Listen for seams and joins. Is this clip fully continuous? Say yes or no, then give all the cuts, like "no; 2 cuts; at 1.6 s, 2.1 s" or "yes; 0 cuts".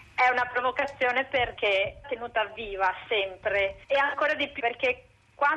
no; 4 cuts; at 1.6 s, 2.0 s, 3.8 s, 4.6 s